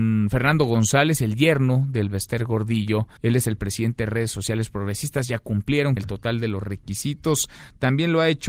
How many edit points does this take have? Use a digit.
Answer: 2